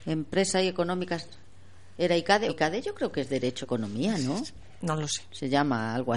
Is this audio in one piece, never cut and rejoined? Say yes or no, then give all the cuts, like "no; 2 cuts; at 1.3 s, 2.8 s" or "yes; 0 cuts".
no; 2 cuts; at 2.5 s, 3.6 s